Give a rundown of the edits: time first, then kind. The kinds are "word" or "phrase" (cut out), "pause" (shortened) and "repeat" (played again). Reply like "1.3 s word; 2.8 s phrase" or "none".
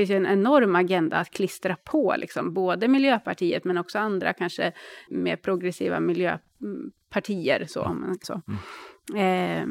5.1 s word; 8.2 s word